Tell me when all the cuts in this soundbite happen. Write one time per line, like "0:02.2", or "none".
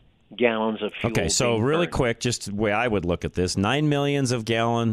none